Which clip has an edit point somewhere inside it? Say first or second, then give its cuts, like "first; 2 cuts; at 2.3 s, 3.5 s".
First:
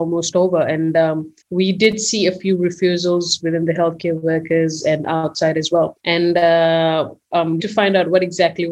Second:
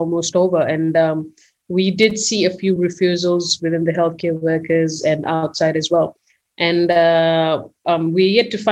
first; 3 cuts; at 1.4 s, 6.0 s, 7.6 s